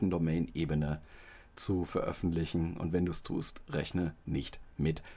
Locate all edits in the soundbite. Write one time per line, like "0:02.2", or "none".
none